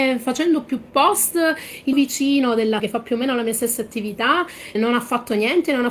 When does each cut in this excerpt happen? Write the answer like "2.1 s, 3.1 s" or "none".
1.9 s, 2.8 s, 4.8 s